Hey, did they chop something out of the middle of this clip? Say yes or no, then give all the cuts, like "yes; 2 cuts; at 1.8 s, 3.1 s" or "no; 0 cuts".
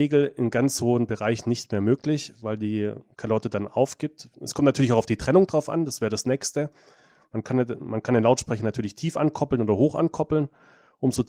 no; 0 cuts